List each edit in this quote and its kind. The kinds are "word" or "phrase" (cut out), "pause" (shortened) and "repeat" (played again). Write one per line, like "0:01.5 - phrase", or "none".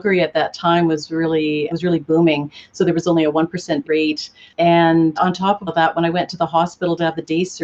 0:01.7 - word
0:03.8 - word
0:05.2 - word
0:05.7 - word